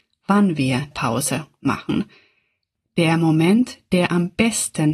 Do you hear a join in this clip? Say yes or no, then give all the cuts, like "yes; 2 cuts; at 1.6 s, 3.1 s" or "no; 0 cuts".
yes; 1 cut; at 0.9 s